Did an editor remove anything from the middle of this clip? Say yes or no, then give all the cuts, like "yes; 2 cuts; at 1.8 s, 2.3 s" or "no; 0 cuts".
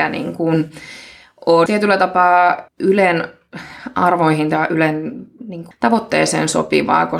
yes; 3 cuts; at 1.7 s, 2.7 s, 5.7 s